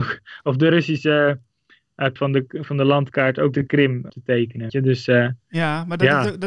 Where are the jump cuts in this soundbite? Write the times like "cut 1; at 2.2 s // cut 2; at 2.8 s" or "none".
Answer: cut 1; at 2.2 s // cut 2; at 3.5 s // cut 3; at 4.1 s // cut 4; at 4.7 s